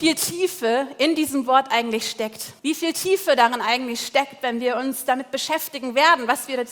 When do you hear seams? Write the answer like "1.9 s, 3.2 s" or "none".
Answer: 2.6 s

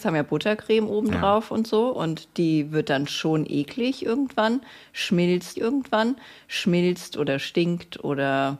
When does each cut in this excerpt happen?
5.5 s

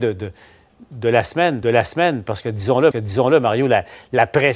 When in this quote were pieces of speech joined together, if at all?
1.6 s, 2.9 s

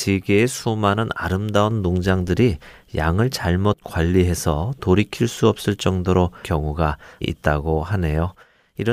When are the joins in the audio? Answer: 6.4 s, 7.2 s

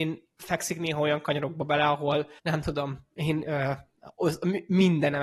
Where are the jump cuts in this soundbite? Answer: 2.4 s

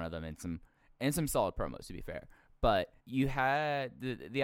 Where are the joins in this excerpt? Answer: 3.0 s

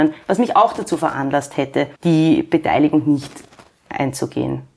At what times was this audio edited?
2.0 s

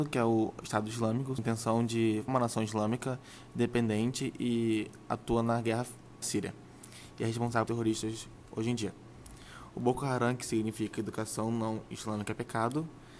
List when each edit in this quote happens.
1.4 s, 2.3 s, 6.2 s, 7.7 s

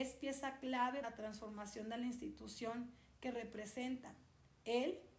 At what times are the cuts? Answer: 1.0 s

